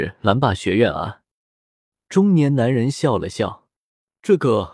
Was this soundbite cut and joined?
no; 0 cuts

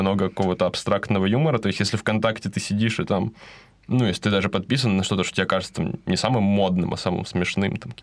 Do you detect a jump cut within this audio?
no; 0 cuts

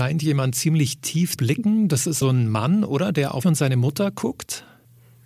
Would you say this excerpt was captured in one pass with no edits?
no; 3 cuts; at 1.4 s, 2.2 s, 3.4 s

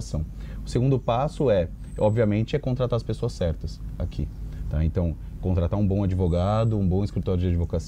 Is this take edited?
no; 0 cuts

